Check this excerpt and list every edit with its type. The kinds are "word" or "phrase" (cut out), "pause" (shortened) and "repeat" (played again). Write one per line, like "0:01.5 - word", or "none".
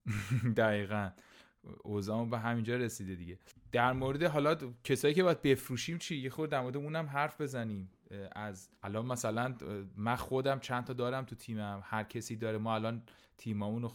0:03.5 - pause
0:08.8 - pause